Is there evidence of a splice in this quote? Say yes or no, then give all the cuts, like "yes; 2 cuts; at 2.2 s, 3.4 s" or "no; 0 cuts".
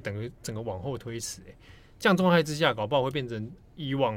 no; 0 cuts